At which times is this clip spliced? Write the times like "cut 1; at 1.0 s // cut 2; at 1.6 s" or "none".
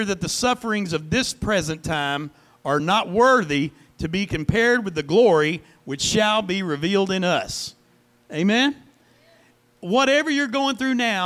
none